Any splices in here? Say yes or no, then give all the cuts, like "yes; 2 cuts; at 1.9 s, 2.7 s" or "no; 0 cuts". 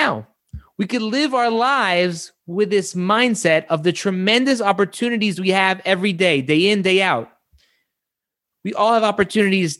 no; 0 cuts